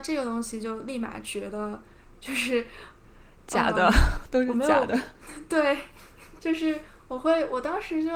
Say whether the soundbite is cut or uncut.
cut